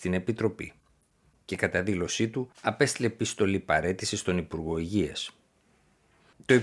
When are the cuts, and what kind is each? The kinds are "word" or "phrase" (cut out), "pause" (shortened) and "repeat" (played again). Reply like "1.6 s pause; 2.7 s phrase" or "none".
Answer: 2.5 s pause